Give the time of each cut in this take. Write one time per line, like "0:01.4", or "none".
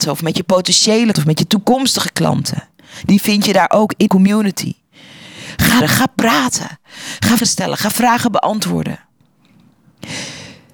0:01.1
0:04.1
0:05.8
0:07.4

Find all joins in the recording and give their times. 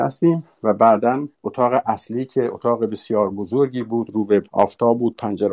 0:01.3
0:04.5

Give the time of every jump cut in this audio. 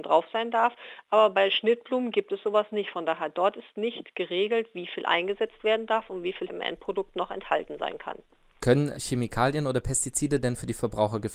0:06.5
0:09.0

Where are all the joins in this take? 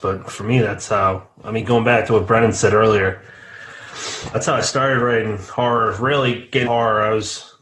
0:04.3
0:06.6

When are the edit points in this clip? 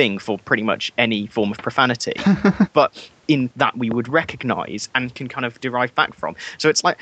0:03.5

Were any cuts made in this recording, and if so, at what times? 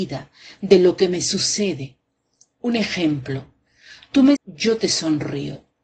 0:04.4

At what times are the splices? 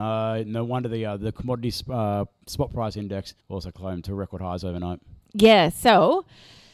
0:03.4

